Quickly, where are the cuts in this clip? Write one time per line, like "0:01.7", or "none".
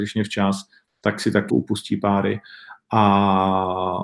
0:01.5